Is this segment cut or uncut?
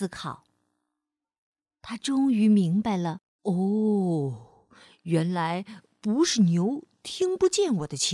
cut